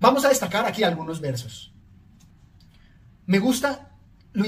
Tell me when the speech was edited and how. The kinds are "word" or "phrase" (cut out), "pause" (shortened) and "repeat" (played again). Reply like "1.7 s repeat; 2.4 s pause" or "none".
none

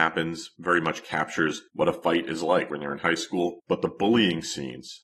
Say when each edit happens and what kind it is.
2.7 s word

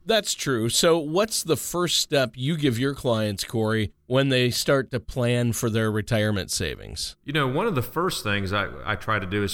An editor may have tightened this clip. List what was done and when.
4.0 s pause; 7.2 s pause

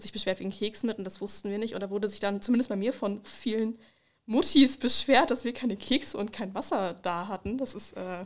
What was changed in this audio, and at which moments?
3.2 s word

